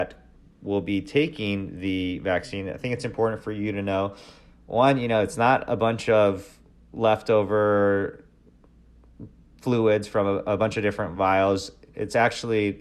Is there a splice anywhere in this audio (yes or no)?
no